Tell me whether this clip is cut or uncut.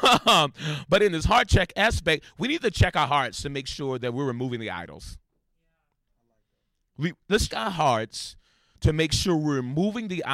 cut